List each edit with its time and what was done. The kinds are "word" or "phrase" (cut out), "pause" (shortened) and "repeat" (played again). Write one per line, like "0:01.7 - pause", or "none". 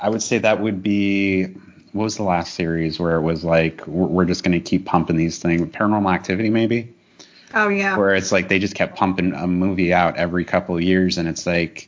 none